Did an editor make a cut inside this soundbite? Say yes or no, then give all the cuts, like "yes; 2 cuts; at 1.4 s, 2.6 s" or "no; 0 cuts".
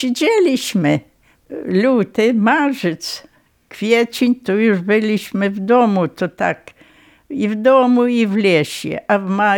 no; 0 cuts